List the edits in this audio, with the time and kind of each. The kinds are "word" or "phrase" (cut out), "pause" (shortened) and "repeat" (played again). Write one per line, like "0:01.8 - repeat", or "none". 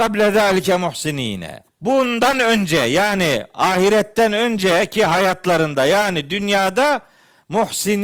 0:01.7 - pause